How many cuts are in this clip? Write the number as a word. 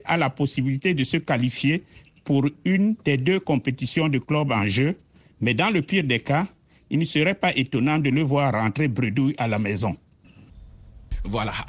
zero